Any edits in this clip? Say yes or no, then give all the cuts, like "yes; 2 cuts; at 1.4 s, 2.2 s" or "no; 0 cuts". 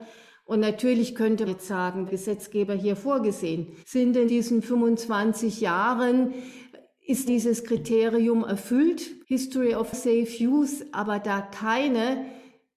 yes; 6 cuts; at 1.4 s, 2.1 s, 3.8 s, 4.3 s, 7.3 s, 9.2 s